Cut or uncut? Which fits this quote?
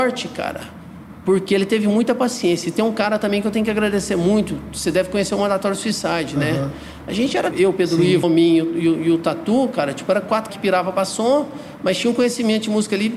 cut